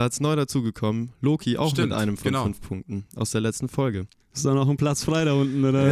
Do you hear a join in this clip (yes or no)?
no